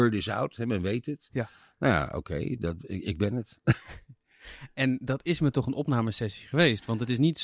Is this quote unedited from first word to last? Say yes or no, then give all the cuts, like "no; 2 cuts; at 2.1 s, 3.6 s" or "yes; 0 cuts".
yes; 0 cuts